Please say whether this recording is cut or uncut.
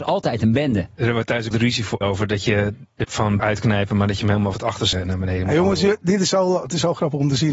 cut